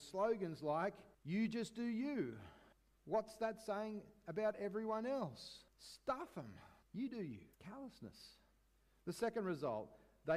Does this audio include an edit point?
yes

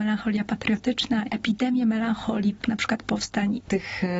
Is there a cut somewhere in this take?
yes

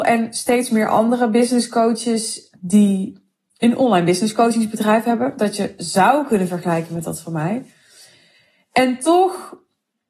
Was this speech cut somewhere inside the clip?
no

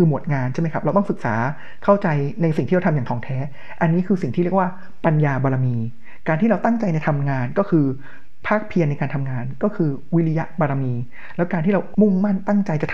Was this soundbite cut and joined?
yes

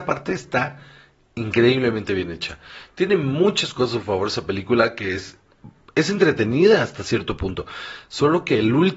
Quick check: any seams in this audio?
no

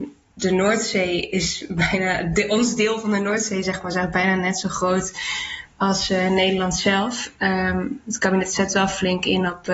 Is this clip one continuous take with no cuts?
yes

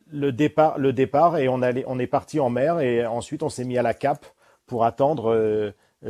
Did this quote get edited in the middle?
no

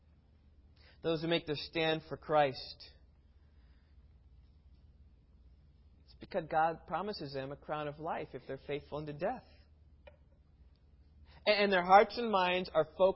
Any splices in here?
no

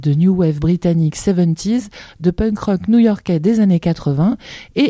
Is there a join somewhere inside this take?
no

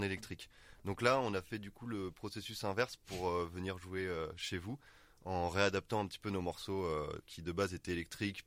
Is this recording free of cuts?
yes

